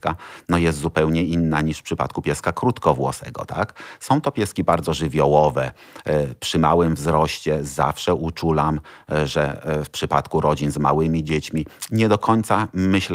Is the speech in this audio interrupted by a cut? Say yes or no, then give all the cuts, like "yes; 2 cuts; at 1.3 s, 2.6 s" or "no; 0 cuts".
no; 0 cuts